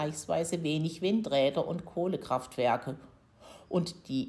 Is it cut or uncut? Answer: uncut